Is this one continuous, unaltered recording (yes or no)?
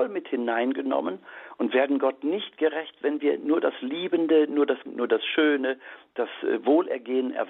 no